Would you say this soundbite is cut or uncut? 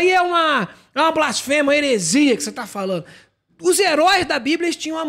uncut